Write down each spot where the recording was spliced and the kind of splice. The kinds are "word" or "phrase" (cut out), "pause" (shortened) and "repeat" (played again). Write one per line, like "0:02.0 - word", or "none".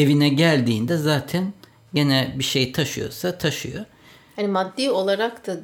none